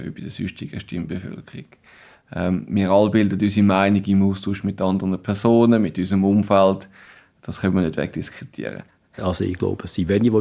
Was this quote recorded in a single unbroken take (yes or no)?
yes